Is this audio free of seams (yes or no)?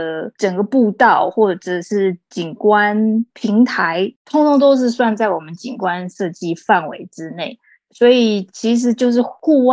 no